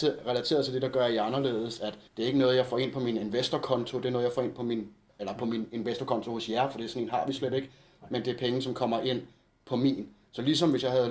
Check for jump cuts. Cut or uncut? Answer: cut